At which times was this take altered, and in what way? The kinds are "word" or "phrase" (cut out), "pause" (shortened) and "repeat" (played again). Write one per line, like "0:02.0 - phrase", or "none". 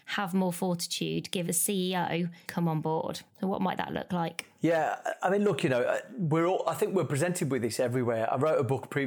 0:01.5 - word
0:02.5 - phrase
0:03.3 - pause